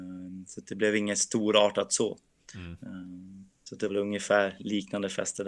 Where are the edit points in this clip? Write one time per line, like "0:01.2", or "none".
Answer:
0:03.5
0:03.9